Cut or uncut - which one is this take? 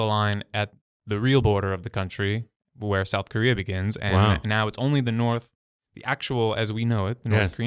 uncut